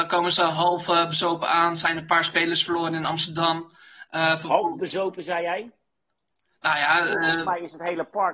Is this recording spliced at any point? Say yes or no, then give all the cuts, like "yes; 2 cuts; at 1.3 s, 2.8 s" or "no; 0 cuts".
no; 0 cuts